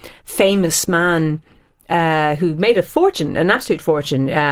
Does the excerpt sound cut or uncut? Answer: uncut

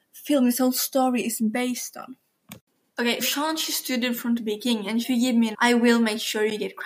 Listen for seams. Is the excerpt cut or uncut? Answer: cut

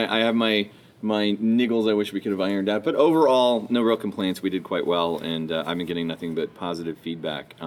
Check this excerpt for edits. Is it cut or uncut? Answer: uncut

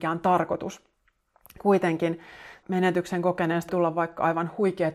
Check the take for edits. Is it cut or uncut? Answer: cut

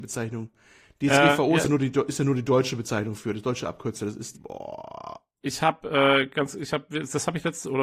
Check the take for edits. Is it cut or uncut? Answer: cut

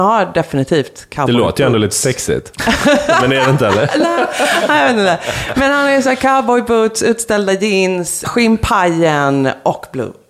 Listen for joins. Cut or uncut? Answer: cut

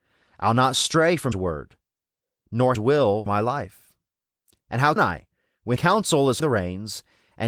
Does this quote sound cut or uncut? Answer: cut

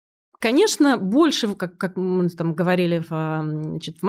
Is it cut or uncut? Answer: uncut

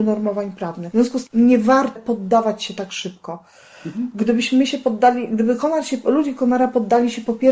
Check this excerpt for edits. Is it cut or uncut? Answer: cut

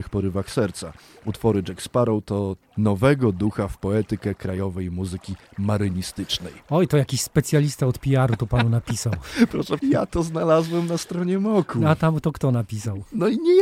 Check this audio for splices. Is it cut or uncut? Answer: cut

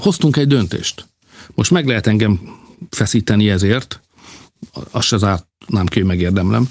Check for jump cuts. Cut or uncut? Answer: uncut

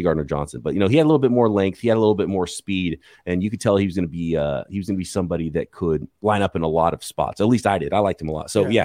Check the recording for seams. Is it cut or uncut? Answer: uncut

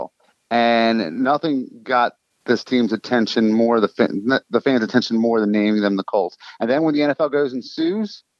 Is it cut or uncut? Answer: uncut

